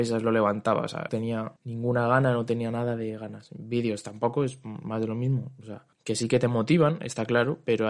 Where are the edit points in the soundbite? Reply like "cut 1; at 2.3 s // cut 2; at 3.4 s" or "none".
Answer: cut 1; at 1.1 s // cut 2; at 1.6 s // cut 3; at 5.9 s